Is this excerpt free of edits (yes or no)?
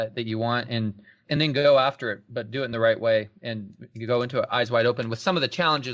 yes